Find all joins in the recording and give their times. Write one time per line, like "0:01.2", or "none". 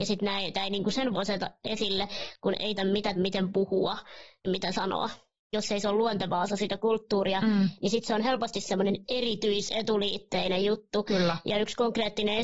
0:01.1
0:02.8
0:03.2
0:04.4

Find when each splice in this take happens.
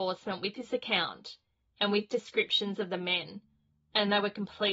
none

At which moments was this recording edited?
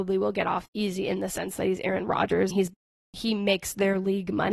0:02.5

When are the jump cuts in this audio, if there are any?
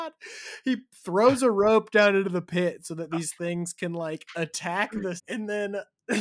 0:05.2

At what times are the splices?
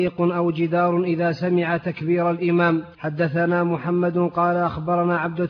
0:02.9

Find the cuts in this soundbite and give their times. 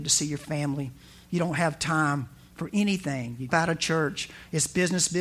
0:03.5

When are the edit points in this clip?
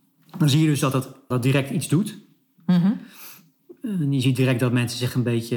0:01.3

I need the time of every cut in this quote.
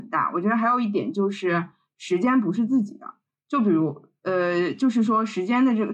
none

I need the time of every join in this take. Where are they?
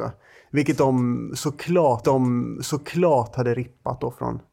0:02.0

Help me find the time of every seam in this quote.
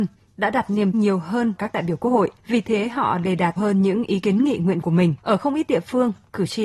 0:00.9
0:01.6
0:02.4
0:03.6
0:04.2
0:04.8
0:05.2

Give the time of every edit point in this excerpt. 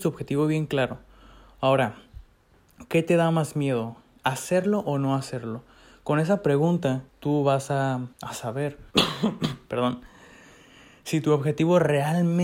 0:07.1
0:08.1
0:08.9

